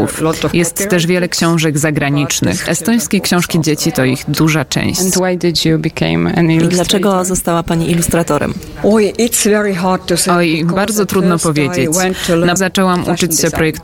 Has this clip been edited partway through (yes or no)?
yes